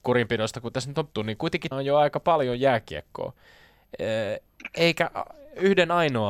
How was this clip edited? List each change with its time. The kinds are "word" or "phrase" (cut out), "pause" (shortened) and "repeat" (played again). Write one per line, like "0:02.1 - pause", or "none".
0:01.2 - word
0:01.7 - word